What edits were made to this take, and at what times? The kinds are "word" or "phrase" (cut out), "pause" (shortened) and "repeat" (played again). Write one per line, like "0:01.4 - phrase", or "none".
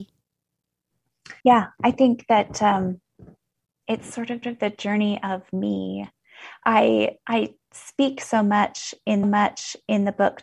0:01.4 - pause
0:04.4 - repeat
0:07.2 - pause
0:09.2 - repeat